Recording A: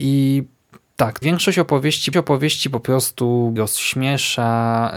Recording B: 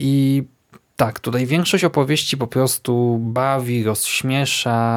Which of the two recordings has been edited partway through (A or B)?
A